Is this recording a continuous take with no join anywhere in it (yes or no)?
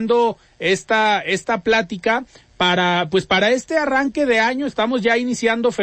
yes